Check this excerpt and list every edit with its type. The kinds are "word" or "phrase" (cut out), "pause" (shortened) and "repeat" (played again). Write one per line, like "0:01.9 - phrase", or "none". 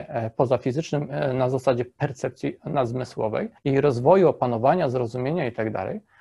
0:03.6 - pause